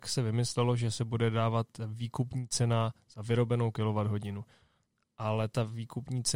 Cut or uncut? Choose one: uncut